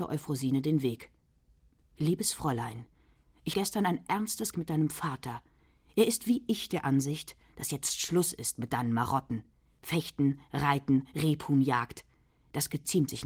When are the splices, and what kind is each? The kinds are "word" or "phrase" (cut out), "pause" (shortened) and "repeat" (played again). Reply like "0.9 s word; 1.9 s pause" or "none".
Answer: 3.5 s word; 4.5 s word